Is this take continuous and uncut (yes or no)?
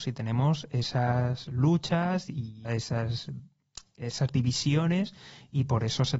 no